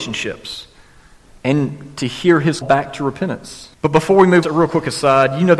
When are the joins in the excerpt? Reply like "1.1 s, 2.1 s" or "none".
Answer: 2.6 s, 3.7 s, 4.4 s